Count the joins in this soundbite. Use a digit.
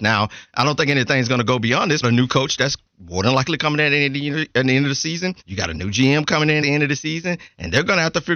3